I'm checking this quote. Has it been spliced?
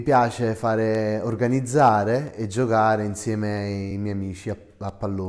no; 0 cuts

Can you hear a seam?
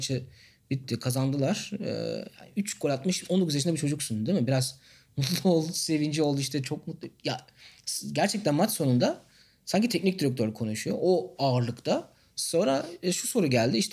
no; 0 cuts

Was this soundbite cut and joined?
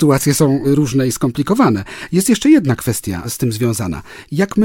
no; 0 cuts

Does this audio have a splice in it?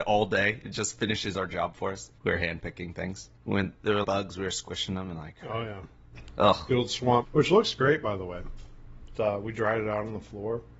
yes; 5 cuts; at 2.2 s, 3.4 s, 4.0 s, 7.2 s, 9.1 s

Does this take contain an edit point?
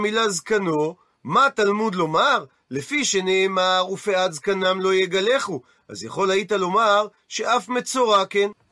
no; 0 cuts

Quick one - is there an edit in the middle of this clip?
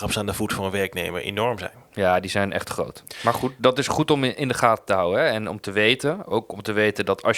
no; 0 cuts

